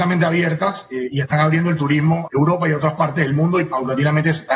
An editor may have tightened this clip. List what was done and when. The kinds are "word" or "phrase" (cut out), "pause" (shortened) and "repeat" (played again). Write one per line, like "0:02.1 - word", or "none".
0:02.3 - word